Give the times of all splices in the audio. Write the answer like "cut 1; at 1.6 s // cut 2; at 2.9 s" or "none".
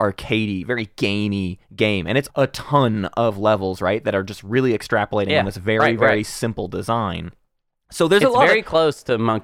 cut 1; at 1.6 s // cut 2; at 2.3 s